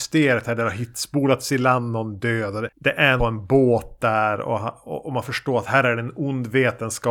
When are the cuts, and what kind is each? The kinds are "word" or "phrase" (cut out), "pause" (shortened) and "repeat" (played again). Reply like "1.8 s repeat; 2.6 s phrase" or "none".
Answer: 3.2 s phrase